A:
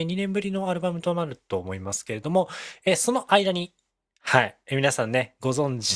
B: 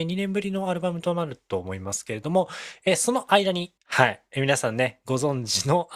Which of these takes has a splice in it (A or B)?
B